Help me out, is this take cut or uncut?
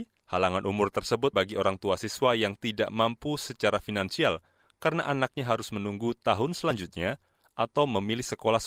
cut